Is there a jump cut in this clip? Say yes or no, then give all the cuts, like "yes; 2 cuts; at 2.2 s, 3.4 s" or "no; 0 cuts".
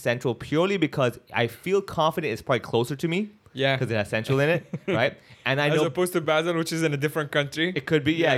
no; 0 cuts